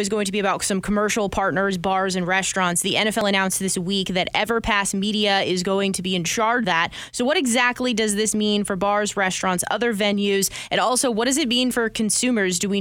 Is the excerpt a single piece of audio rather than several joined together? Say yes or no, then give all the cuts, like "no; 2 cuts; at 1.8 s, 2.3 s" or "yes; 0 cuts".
no; 1 cut; at 6.6 s